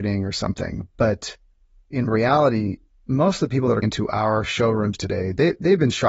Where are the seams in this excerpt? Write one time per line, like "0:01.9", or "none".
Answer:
0:03.8